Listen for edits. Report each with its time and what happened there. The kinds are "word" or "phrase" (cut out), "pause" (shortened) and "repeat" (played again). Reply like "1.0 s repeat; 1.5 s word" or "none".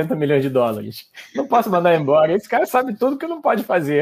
none